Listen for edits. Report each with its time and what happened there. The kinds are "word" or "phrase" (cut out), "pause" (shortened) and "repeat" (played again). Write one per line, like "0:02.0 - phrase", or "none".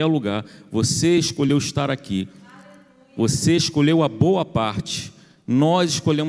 none